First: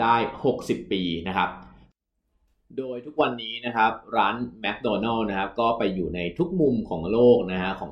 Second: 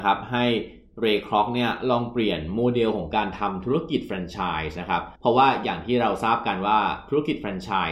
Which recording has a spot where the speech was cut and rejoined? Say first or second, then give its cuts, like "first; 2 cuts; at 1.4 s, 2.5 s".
second; 1 cut; at 5.2 s